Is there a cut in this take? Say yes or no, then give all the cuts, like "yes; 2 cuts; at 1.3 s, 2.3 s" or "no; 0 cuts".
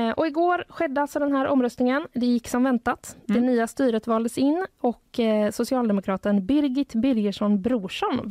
no; 0 cuts